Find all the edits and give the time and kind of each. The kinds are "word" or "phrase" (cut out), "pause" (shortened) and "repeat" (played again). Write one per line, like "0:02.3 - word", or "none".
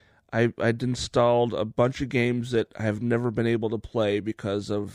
none